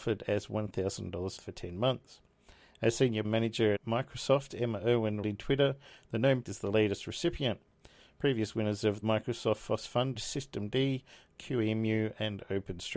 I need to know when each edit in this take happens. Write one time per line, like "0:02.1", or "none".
0:01.4
0:03.2
0:03.8
0:05.2
0:06.4
0:09.0
0:10.1
0:11.3